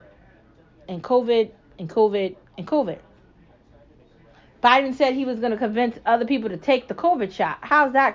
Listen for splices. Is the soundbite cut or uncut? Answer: uncut